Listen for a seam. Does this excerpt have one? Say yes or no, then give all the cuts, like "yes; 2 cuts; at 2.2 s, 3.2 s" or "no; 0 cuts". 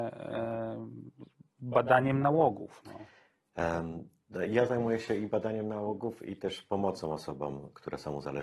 no; 0 cuts